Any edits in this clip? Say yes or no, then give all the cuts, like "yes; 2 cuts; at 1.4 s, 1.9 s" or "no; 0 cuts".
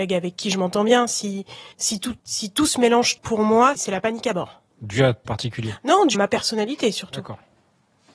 yes; 7 cuts; at 1.7 s, 2.2 s, 3.2 s, 3.7 s, 4.7 s, 5.3 s, 6.1 s